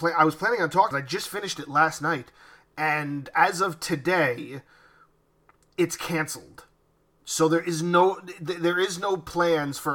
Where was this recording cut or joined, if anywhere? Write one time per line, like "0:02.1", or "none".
0:00.9